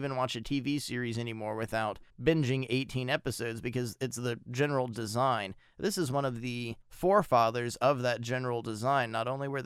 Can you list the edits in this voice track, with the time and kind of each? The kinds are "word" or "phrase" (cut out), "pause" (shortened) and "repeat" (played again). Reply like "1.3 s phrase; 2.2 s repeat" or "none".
2.1 s pause; 6.8 s pause